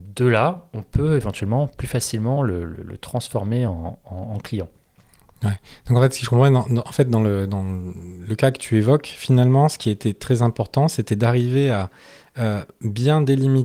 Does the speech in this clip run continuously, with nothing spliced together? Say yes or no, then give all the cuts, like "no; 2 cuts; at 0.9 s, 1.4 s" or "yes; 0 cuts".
yes; 0 cuts